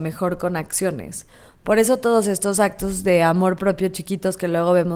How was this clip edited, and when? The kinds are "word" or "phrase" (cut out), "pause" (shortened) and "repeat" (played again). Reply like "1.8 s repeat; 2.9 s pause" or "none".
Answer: none